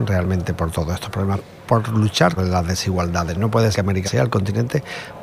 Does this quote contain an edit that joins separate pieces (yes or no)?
yes